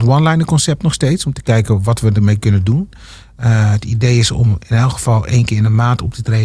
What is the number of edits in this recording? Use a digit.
0